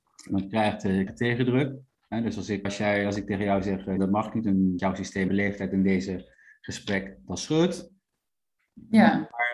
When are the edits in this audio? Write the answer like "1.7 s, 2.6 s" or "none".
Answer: 1.1 s, 2.6 s, 4.0 s, 4.8 s, 5.3 s